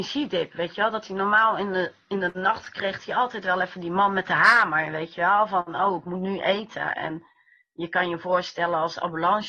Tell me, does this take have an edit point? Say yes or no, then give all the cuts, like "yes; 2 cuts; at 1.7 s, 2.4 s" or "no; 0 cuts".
no; 0 cuts